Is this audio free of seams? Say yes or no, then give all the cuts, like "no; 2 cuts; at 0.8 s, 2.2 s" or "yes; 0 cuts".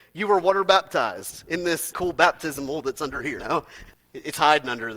no; 2 cuts; at 1.9 s, 3.4 s